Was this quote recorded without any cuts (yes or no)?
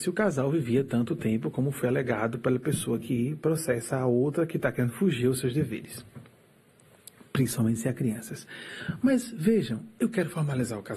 yes